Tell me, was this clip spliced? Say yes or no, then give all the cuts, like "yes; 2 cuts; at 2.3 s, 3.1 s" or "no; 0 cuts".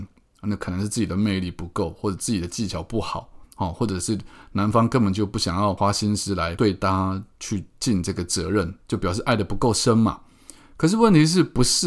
yes; 2 cuts; at 3.4 s, 8.8 s